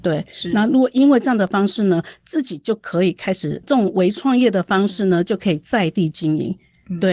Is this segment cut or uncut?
cut